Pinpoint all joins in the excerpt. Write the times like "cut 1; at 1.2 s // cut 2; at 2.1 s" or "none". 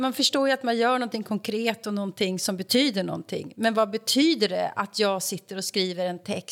none